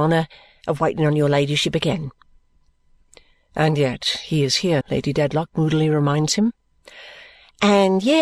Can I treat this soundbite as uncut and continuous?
no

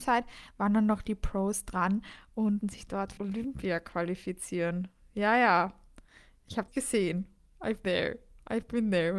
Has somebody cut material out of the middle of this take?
yes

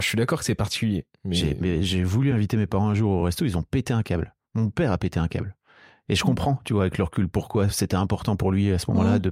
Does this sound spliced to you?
no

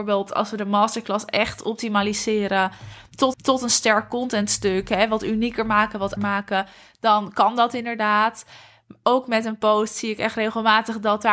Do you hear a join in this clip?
yes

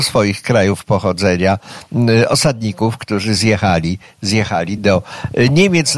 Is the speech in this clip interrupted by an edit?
no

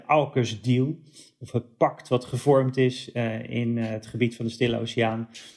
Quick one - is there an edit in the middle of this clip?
no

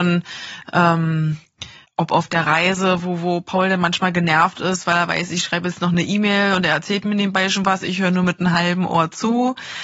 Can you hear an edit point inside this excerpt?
yes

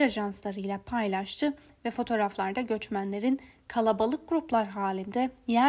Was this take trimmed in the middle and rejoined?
no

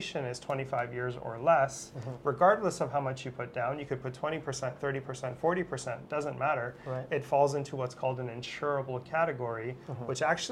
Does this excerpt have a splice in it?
no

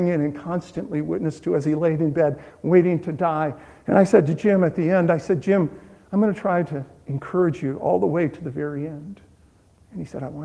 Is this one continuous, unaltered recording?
yes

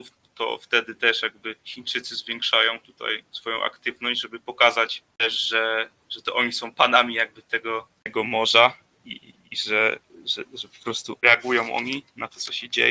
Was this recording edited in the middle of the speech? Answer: no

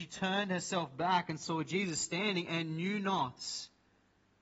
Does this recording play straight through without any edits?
yes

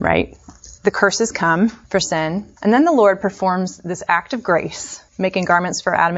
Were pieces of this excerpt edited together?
yes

